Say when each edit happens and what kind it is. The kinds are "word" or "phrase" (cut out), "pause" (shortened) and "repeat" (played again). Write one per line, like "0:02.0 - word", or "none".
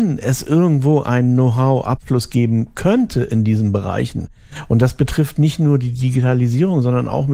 none